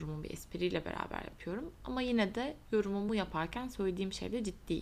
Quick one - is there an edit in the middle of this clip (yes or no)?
no